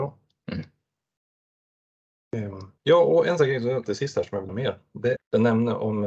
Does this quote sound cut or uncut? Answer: cut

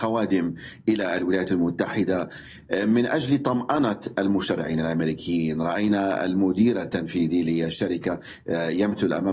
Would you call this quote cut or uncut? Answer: uncut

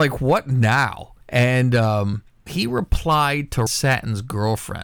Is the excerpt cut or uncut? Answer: cut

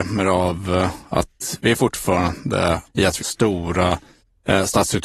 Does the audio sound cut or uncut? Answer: cut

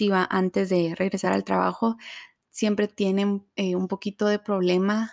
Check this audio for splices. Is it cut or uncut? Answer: uncut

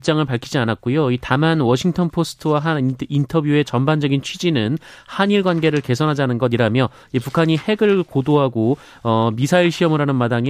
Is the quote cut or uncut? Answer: uncut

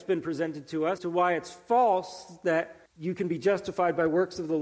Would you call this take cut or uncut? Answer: cut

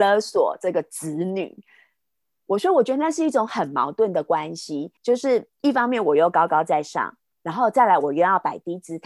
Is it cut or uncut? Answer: cut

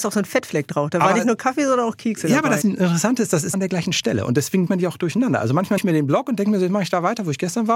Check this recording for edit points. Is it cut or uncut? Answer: cut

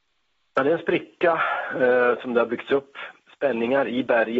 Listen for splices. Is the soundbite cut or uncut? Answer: uncut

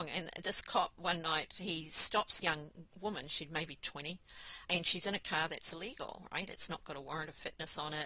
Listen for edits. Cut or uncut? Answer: cut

